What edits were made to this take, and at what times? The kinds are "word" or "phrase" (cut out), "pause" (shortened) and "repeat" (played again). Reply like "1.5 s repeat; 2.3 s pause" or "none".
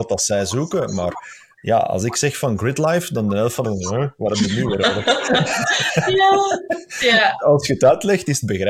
3.6 s phrase